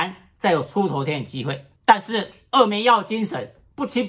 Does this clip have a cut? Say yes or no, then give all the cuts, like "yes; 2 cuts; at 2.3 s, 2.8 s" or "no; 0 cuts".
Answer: yes; 1 cut; at 1.8 s